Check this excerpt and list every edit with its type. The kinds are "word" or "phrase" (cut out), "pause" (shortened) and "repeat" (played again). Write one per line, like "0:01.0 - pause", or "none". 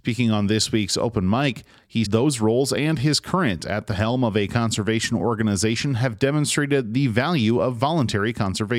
0:02.0 - word